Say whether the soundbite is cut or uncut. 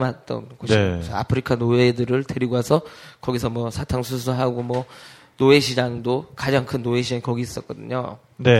uncut